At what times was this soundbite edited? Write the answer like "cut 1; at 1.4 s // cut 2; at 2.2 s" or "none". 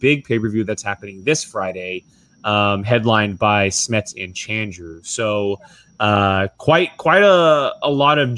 none